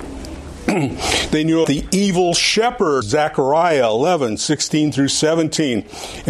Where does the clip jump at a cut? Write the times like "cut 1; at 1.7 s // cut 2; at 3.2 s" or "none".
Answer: cut 1; at 1.6 s // cut 2; at 3.0 s